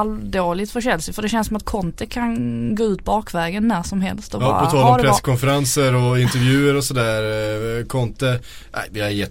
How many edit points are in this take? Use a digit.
0